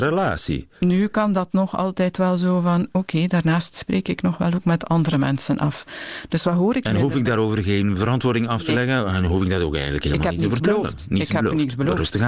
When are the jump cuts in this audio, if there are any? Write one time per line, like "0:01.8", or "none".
none